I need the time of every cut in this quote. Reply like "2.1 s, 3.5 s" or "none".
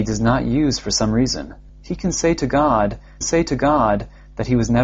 1.7 s, 3.2 s